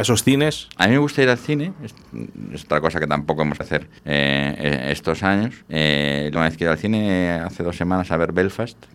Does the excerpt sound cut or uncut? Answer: cut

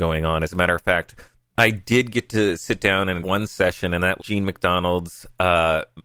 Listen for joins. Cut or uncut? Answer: cut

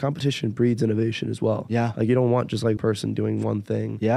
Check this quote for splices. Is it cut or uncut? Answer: cut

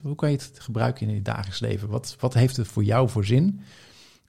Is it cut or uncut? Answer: uncut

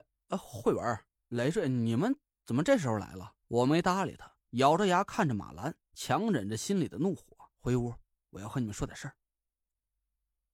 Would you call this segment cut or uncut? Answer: cut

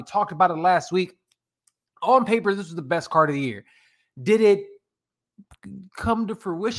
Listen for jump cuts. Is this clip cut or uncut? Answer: uncut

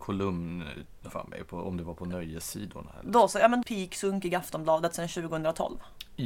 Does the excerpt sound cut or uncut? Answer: cut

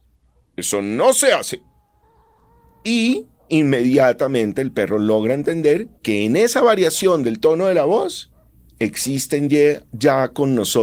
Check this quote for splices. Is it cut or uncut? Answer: cut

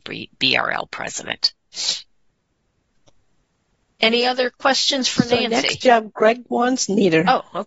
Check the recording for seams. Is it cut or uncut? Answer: uncut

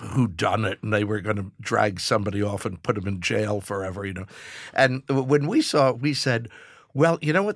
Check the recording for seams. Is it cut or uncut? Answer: uncut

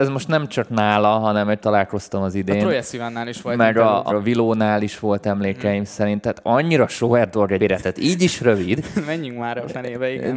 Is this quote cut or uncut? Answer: cut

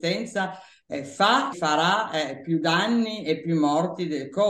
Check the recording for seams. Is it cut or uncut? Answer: cut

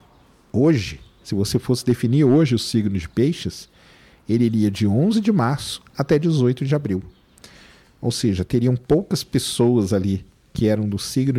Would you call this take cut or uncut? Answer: uncut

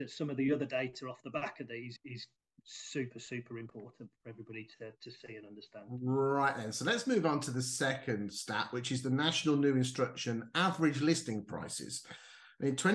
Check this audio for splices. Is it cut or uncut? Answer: cut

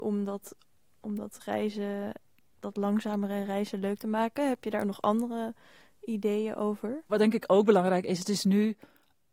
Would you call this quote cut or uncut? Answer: uncut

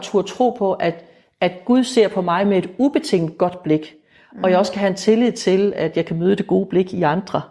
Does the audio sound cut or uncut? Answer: uncut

